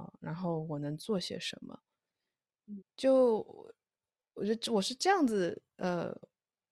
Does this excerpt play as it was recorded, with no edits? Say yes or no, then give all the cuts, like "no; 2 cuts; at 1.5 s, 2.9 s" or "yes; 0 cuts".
no; 1 cut; at 2.8 s